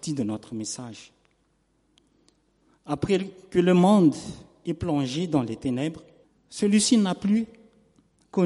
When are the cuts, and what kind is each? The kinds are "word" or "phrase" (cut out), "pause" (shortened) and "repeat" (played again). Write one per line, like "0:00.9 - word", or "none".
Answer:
0:06.2 - pause